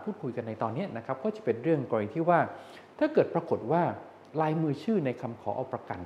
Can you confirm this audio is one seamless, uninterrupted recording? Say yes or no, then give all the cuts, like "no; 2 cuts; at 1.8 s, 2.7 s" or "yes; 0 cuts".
no; 1 cut; at 4.3 s